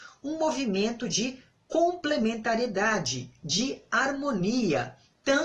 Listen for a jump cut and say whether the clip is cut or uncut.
uncut